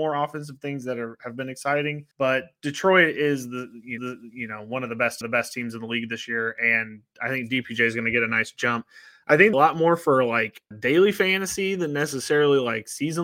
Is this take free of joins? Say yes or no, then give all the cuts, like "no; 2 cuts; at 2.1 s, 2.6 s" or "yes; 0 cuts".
no; 5 cuts; at 2.1 s, 4.0 s, 5.2 s, 9.5 s, 10.7 s